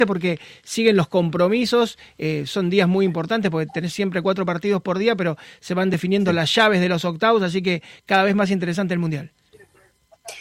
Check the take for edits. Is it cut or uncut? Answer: uncut